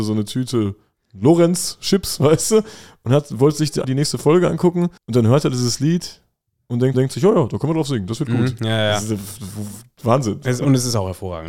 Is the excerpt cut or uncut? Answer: cut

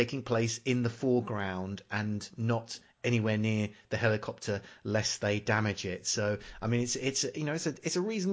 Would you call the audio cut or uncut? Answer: uncut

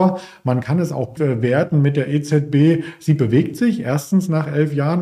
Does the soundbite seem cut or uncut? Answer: cut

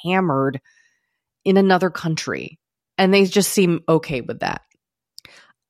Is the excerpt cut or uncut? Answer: uncut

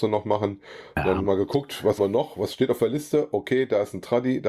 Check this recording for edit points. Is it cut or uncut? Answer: cut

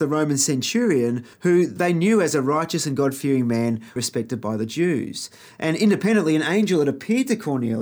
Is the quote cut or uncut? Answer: cut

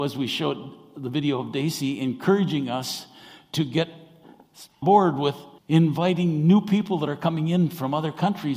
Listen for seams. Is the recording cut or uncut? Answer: cut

